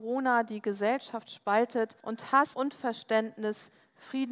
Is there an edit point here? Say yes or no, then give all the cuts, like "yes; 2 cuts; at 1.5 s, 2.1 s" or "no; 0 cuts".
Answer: yes; 2 cuts; at 2.0 s, 2.5 s